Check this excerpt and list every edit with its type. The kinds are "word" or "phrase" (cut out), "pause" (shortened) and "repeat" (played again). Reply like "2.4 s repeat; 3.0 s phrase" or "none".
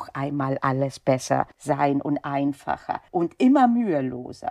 1.5 s pause; 3.1 s pause